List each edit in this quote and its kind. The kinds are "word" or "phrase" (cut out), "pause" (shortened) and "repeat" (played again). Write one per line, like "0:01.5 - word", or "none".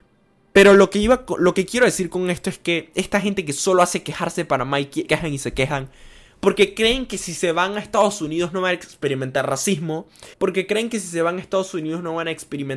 0:05.1 - word
0:10.3 - pause